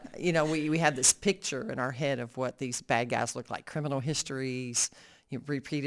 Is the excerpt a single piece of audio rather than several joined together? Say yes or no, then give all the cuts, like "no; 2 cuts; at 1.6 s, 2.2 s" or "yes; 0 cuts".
yes; 0 cuts